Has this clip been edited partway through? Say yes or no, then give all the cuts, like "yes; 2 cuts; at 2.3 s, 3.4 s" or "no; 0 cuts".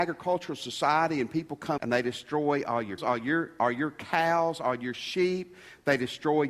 yes; 2 cuts; at 1.8 s, 3.0 s